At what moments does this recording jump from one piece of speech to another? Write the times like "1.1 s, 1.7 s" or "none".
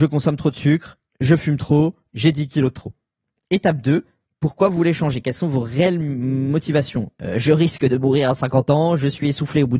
none